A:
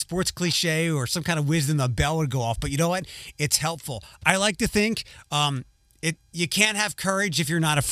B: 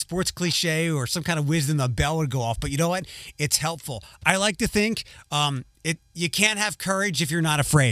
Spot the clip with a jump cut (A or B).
B